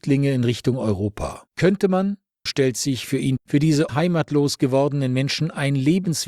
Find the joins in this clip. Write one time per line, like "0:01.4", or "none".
0:01.5
0:02.5
0:03.4
0:03.9